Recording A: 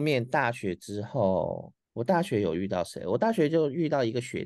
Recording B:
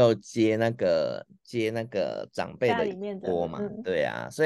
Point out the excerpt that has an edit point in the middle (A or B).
A